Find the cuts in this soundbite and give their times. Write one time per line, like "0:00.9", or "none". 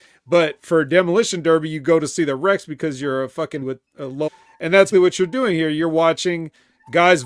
0:03.6
0:04.3
0:04.9